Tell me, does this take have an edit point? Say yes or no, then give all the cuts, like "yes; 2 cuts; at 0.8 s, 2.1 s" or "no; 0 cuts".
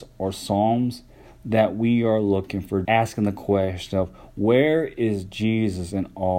yes; 1 cut; at 2.8 s